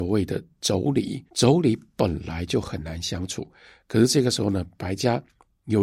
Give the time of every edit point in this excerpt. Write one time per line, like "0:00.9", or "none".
0:01.3